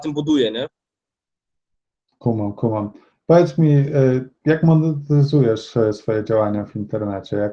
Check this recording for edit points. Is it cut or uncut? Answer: uncut